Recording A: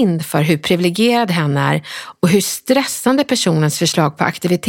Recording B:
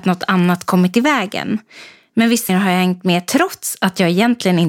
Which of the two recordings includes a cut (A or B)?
B